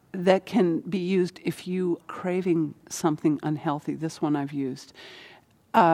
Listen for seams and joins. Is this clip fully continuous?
no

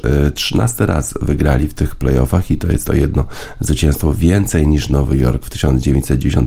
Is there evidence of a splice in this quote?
no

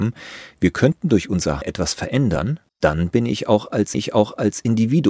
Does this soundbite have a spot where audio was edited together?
yes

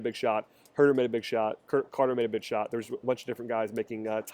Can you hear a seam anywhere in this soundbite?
no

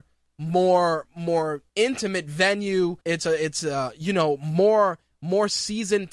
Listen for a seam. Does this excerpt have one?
yes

